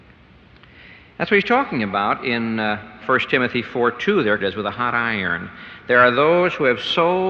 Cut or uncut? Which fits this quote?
cut